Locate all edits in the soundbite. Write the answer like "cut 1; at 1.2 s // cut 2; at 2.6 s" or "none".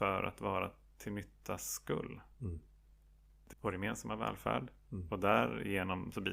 cut 1; at 3.5 s